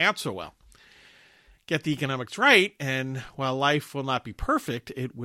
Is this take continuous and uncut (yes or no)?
yes